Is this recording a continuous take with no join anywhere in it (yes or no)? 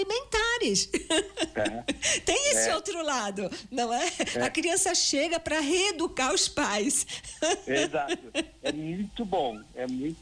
yes